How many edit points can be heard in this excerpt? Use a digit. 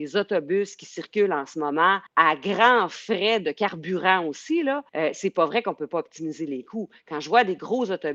2